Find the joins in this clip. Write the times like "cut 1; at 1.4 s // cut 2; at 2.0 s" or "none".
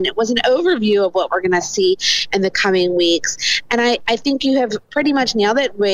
none